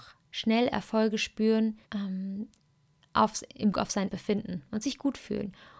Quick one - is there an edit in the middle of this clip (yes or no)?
yes